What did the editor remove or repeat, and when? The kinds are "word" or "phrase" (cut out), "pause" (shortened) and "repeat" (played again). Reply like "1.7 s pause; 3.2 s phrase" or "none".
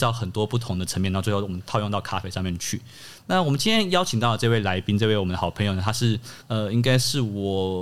6.4 s pause